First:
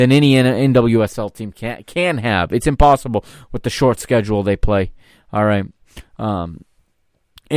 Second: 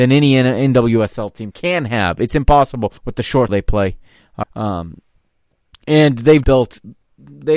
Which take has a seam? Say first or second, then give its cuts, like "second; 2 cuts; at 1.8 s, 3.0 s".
second; 5 cuts; at 1.5 s, 3.0 s, 3.5 s, 4.4 s, 6.4 s